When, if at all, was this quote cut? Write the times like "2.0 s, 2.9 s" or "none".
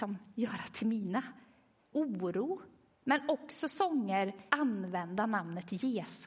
1.9 s, 2.9 s, 4.5 s